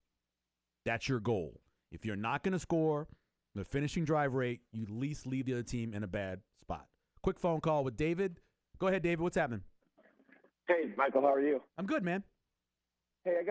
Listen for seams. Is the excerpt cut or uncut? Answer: uncut